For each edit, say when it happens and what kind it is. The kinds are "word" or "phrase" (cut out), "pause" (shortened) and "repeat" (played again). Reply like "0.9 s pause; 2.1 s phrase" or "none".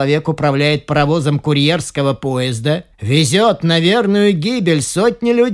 2.9 s pause

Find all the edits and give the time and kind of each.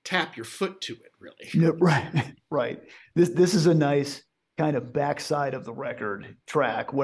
none

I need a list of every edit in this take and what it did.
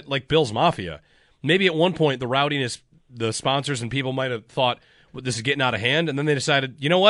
none

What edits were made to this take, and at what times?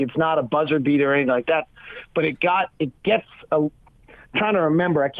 none

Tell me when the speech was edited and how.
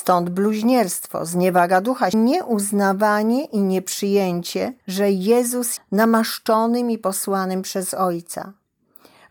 2.1 s phrase; 4.8 s pause; 5.8 s phrase

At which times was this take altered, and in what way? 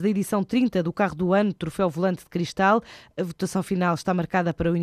none

